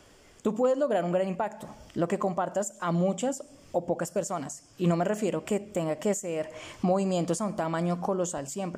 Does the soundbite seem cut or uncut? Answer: uncut